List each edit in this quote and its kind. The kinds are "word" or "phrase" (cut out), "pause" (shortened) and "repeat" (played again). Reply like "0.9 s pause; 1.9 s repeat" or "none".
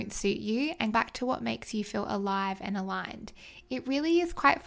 0.9 s word

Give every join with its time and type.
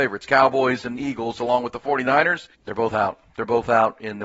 2.5 s pause

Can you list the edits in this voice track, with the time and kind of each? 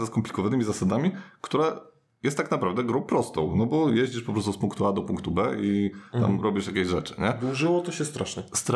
none

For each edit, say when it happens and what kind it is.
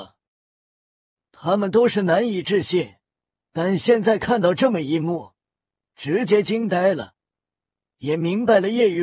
none

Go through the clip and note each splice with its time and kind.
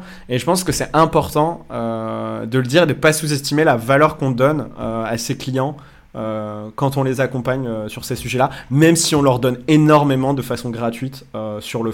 none

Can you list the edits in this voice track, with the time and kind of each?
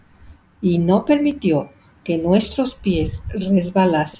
none

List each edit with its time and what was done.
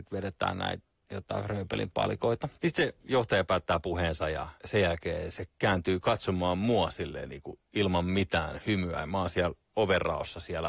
2.5 s pause; 3.0 s pause; 4.6 s pause

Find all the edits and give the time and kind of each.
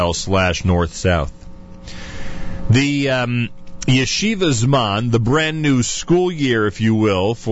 none

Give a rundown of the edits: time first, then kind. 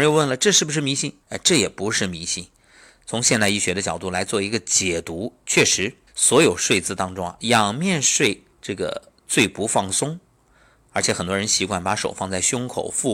1.2 s pause; 6.1 s pause; 8.5 s pause

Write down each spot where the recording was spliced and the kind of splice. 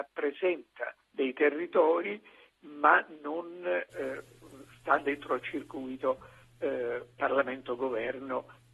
1.0 s pause

